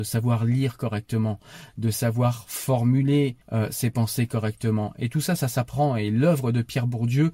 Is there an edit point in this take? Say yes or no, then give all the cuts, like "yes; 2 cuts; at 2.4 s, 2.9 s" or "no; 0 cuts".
yes; 1 cut; at 3.4 s